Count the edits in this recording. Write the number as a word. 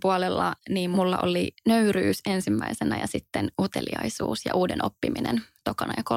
zero